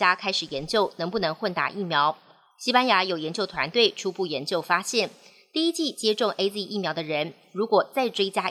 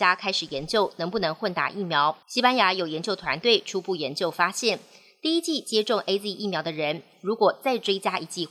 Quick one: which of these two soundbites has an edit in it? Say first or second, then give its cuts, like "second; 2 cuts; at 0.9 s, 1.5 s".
second; 1 cut; at 2.2 s